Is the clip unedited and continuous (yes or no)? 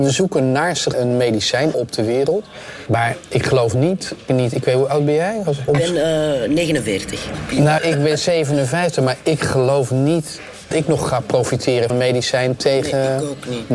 no